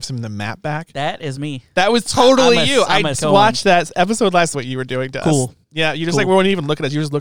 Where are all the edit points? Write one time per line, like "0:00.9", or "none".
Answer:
0:03.1
0:04.5
0:05.6